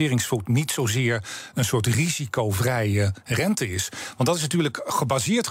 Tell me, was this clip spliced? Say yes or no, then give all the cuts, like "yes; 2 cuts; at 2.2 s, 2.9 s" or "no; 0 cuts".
no; 0 cuts